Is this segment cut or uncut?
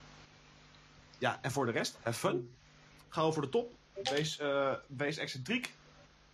uncut